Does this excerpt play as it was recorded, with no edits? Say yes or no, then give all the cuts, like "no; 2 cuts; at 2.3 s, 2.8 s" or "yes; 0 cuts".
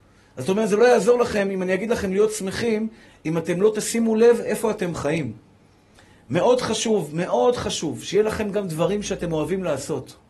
yes; 0 cuts